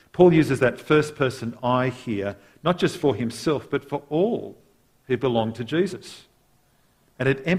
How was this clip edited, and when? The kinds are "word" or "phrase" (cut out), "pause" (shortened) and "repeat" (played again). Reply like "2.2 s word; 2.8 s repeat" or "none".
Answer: none